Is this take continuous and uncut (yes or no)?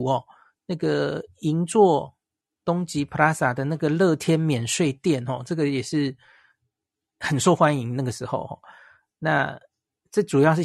yes